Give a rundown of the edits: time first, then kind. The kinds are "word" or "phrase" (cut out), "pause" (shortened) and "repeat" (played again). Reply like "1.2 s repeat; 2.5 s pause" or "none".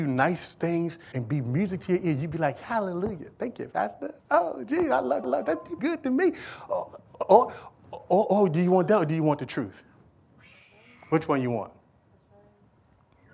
1.1 s word; 4.2 s pause; 5.2 s repeat; 5.8 s word